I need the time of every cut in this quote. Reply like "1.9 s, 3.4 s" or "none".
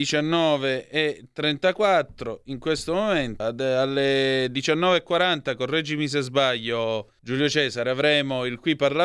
3.4 s, 7.2 s